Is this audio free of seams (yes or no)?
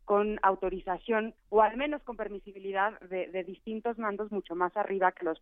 no